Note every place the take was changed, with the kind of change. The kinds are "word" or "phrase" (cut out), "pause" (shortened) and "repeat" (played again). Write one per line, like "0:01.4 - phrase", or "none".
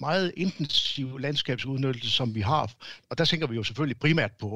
0:03.0 - pause